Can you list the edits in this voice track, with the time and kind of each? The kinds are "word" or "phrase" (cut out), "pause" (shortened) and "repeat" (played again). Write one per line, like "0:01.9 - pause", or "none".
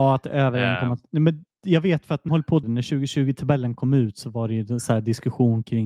0:02.3 - word
0:02.6 - word